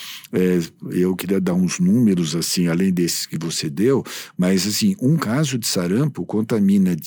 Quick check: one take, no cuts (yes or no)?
yes